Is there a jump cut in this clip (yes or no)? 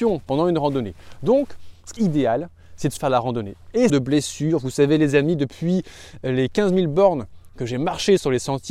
yes